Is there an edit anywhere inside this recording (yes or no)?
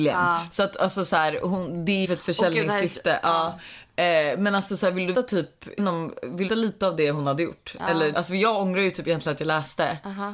yes